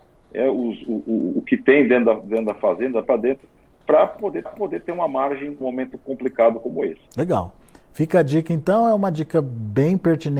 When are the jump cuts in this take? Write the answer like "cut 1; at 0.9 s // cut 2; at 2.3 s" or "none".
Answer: cut 1; at 3.0 s // cut 2; at 4.4 s // cut 3; at 5.6 s // cut 4; at 7.1 s